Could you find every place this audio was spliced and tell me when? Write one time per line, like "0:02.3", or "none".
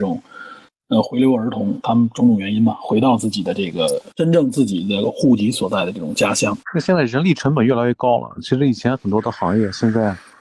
0:04.1
0:06.6